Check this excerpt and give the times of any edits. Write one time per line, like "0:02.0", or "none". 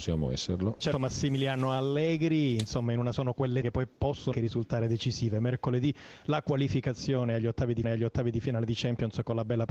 0:00.9
0:03.1
0:03.6
0:04.3
0:07.8